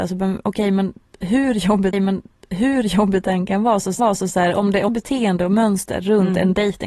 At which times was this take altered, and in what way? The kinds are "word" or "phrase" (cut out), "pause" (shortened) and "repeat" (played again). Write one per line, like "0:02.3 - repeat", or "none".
0:01.9 - repeat
0:04.0 - repeat
0:04.9 - phrase